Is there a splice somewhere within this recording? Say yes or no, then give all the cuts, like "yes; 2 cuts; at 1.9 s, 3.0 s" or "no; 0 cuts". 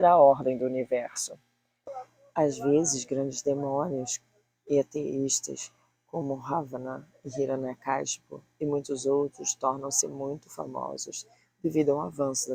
no; 0 cuts